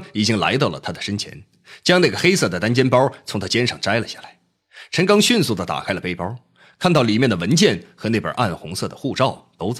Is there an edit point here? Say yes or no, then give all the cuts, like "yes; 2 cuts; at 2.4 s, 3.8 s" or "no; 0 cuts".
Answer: no; 0 cuts